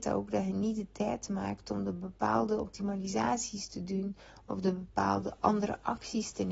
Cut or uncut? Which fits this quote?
uncut